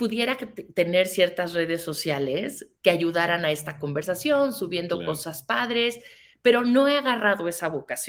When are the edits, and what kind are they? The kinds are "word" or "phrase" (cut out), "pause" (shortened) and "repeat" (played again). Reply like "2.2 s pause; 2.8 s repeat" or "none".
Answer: none